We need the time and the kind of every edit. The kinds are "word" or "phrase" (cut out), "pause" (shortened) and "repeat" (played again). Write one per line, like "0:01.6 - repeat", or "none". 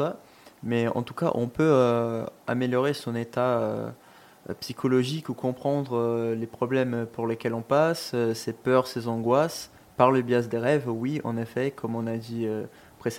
none